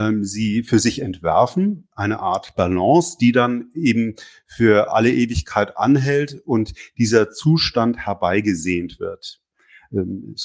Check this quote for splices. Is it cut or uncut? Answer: uncut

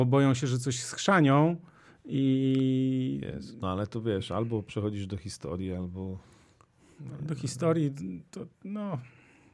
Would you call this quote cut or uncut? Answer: uncut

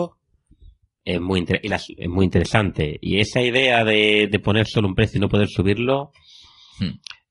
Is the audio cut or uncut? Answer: uncut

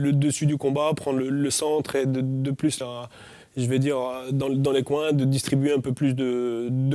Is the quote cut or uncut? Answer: cut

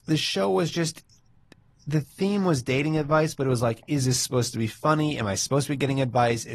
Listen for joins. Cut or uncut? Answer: uncut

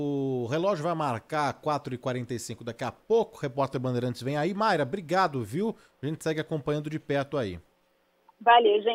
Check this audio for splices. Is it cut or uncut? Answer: uncut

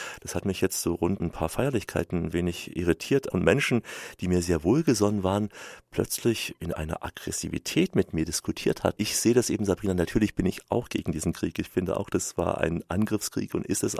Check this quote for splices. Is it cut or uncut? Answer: cut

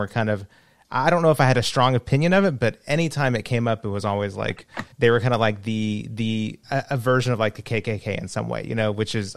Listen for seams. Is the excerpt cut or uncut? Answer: cut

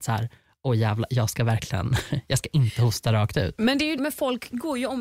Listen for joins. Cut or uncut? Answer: cut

